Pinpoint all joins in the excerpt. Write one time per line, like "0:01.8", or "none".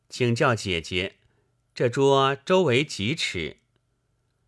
none